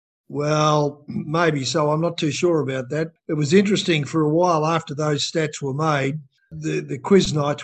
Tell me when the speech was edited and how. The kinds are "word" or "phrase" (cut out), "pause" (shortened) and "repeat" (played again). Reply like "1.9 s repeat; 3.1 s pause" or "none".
none